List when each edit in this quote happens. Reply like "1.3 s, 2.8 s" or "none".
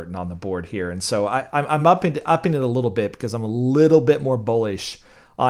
none